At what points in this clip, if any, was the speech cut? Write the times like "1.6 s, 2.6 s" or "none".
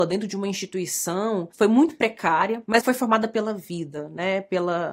2.8 s